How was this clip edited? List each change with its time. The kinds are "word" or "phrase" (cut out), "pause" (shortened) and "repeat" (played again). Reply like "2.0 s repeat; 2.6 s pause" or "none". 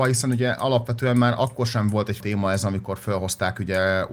2.2 s word